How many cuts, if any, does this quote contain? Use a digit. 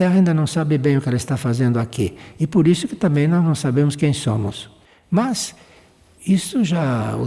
0